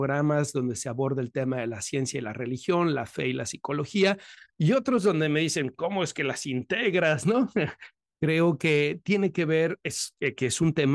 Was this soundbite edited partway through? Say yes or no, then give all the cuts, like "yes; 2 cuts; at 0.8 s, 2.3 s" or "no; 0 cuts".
no; 0 cuts